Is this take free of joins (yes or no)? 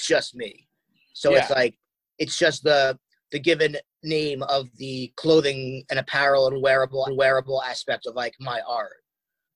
no